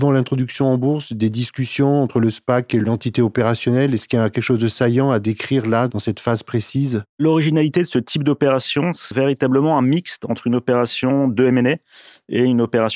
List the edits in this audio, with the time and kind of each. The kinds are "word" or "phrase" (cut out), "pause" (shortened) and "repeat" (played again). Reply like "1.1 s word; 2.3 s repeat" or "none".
7.1 s pause; 9.1 s word